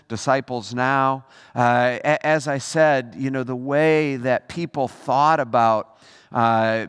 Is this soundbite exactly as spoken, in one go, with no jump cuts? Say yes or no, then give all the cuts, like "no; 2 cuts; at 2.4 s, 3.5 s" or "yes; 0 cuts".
yes; 0 cuts